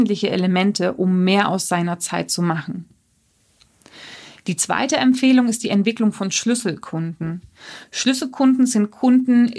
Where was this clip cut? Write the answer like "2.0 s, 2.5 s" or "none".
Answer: none

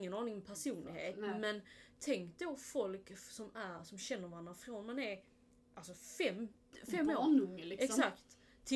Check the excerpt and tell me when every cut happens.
none

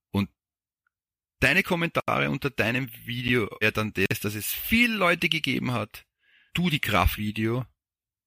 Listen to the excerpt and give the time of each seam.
3.6 s, 6.5 s, 7.2 s

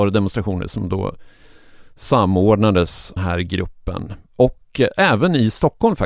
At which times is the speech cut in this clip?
3.2 s

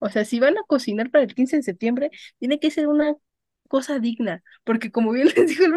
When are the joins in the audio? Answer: none

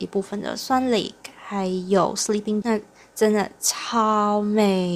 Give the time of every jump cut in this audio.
2.6 s

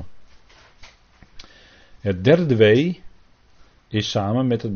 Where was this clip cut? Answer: none

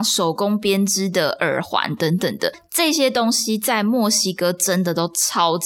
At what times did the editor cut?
none

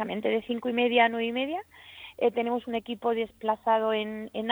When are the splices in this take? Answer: none

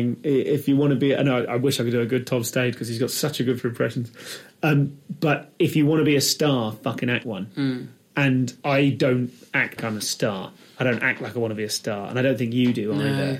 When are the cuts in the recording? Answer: 3.6 s, 7.2 s, 8.6 s, 9.8 s

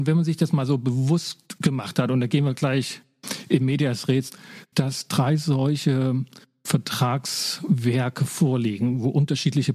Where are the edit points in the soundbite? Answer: 4.7 s

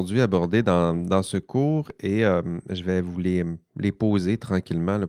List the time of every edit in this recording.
none

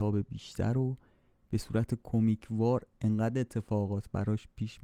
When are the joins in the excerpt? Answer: none

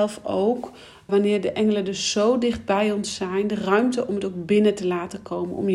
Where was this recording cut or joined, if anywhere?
1.1 s

